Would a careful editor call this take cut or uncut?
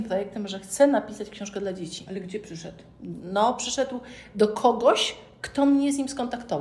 uncut